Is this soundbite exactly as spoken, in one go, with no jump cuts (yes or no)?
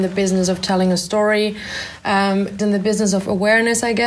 no